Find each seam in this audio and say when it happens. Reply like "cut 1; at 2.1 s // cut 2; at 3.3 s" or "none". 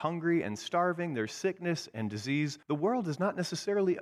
cut 1; at 2.6 s